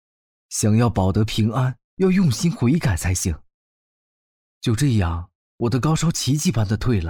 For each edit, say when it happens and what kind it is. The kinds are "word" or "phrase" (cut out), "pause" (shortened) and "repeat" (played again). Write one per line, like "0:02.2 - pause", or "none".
0:01.8 - pause